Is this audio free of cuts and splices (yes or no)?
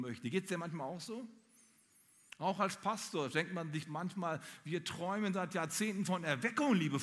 yes